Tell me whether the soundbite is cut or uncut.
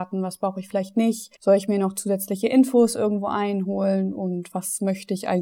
cut